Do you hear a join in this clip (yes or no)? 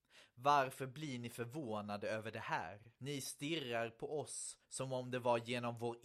yes